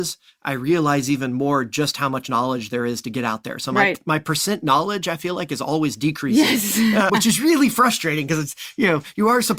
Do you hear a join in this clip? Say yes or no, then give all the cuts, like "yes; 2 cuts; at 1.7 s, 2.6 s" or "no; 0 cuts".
yes; 1 cut; at 7.1 s